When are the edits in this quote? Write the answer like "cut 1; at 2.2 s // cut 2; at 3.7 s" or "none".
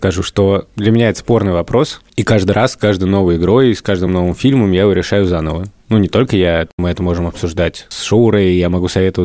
none

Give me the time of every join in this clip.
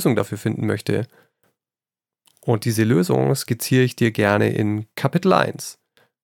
none

